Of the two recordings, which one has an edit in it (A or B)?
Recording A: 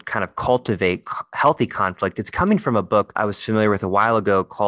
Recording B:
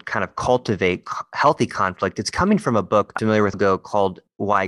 B